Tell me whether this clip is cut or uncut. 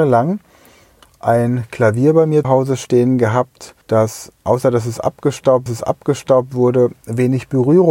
cut